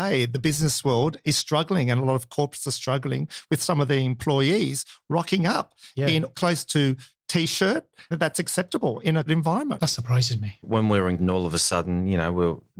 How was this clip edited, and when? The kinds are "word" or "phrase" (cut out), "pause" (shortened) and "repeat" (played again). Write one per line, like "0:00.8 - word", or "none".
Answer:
0:06.3 - word
0:07.1 - word
0:08.1 - word
0:09.3 - word
0:10.6 - word
0:11.2 - word